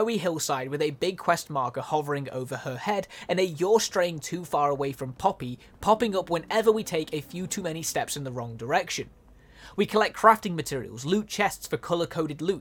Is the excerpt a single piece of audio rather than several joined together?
yes; 0 cuts

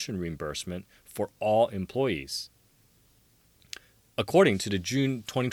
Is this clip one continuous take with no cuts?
yes; 0 cuts

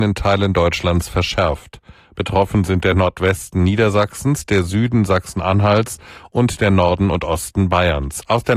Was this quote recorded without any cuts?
yes; 0 cuts

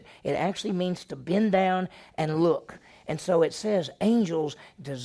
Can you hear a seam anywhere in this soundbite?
no; 0 cuts

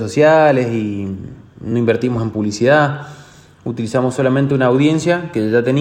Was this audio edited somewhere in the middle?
no; 0 cuts

